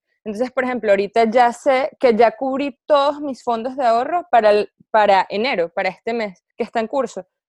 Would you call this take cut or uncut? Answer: cut